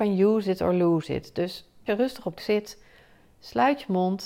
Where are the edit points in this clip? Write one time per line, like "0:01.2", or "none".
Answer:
0:01.9
0:02.4